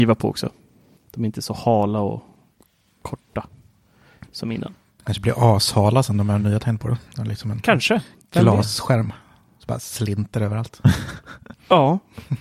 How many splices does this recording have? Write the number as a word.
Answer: zero